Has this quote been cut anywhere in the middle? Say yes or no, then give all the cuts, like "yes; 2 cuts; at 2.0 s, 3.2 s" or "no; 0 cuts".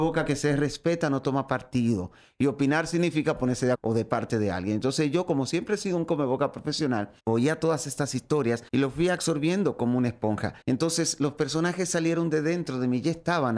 yes; 4 cuts; at 3.7 s, 7.2 s, 8.7 s, 10.6 s